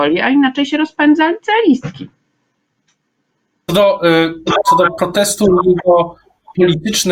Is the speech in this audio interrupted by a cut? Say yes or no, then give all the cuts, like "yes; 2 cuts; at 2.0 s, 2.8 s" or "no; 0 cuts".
no; 0 cuts